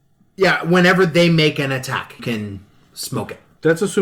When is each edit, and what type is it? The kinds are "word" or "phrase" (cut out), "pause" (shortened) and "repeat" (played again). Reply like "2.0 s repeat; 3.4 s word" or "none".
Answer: 2.2 s word